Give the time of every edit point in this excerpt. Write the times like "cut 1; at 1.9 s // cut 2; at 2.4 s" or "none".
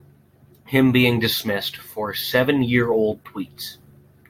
none